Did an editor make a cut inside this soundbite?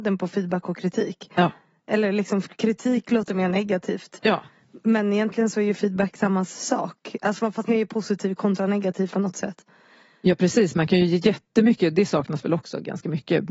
yes; 2 cuts; at 7.7 s, 9.1 s

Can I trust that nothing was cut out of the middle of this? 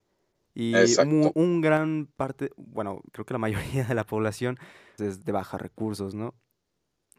no; 3 cuts; at 1.3 s, 3.1 s, 5.0 s

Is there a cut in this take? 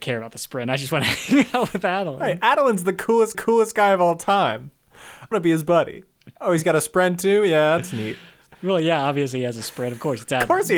yes; 4 cuts; at 3.3 s, 5.3 s, 6.4 s, 8.5 s

